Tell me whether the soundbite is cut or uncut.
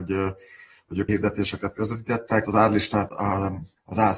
cut